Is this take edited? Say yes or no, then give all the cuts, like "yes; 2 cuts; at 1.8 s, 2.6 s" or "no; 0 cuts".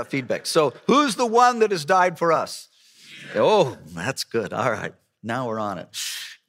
no; 0 cuts